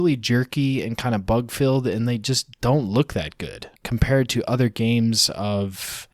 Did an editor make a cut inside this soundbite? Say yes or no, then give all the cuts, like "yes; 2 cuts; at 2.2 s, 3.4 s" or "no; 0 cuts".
yes; 2 cuts; at 2.5 s, 3.8 s